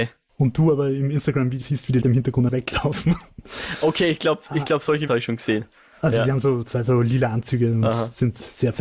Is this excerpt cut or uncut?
cut